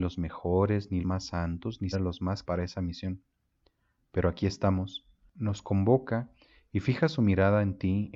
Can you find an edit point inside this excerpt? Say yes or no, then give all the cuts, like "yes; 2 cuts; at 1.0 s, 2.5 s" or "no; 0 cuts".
yes; 3 cuts; at 1.0 s, 1.9 s, 2.4 s